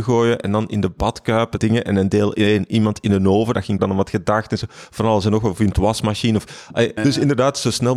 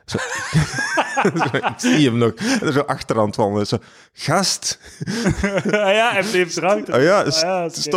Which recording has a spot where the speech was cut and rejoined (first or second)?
first